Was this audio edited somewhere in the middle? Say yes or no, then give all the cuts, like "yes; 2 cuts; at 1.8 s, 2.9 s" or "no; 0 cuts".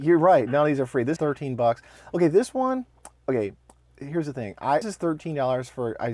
yes; 2 cuts; at 1.2 s, 4.8 s